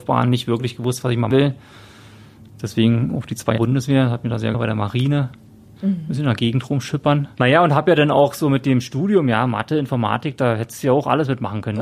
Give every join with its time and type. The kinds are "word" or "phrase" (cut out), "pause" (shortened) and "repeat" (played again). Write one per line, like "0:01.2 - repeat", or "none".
0:01.3 - word
0:03.6 - word
0:04.5 - word